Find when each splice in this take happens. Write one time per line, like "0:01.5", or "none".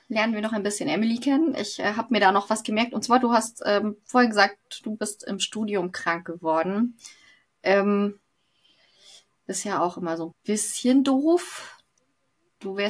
0:10.3